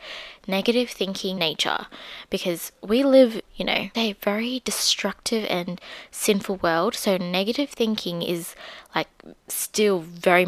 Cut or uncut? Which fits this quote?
cut